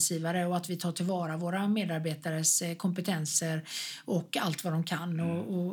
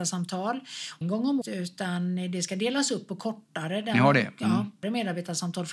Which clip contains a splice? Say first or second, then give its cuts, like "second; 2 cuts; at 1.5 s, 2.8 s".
second; 3 cuts; at 1.0 s, 1.4 s, 4.8 s